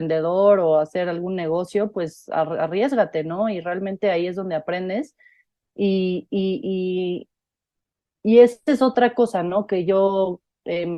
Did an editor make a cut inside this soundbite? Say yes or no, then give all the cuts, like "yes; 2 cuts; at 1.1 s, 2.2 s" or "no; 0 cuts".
no; 0 cuts